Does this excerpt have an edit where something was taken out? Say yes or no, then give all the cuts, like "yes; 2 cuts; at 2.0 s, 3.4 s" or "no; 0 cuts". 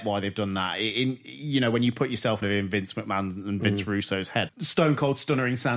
yes; 2 cuts; at 2.4 s, 4.5 s